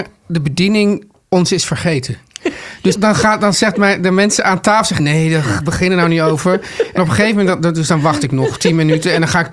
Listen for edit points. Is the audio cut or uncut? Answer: cut